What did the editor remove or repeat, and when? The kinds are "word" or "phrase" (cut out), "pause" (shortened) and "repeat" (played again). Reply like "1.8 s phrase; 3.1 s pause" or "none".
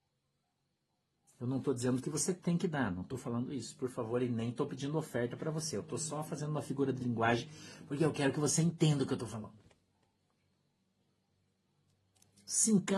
none

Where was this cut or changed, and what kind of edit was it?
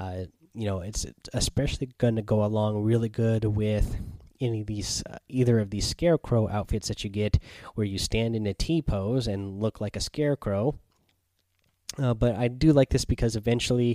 none

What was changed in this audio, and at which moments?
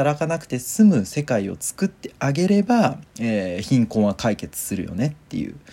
3.1 s pause

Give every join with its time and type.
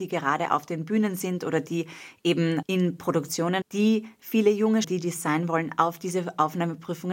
2.6 s word; 3.6 s phrase; 4.8 s phrase

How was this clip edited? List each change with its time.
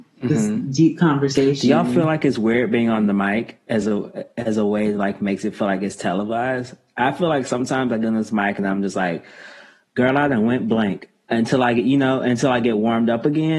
none

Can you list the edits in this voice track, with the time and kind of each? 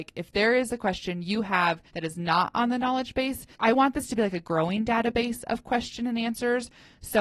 1.9 s pause; 3.5 s pause

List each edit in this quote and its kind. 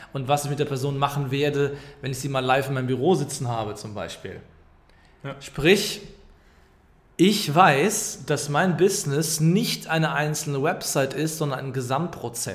none

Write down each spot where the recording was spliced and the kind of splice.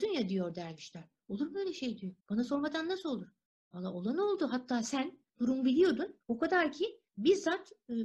2.2 s pause; 3.5 s pause; 5.3 s pause; 6.2 s pause; 7.1 s pause

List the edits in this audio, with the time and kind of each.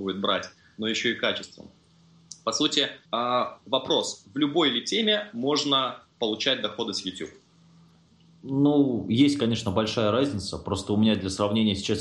3.1 s pause

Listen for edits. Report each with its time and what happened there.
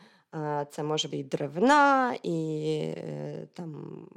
1.1 s word

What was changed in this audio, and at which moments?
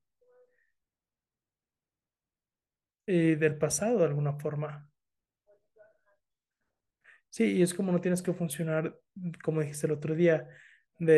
none

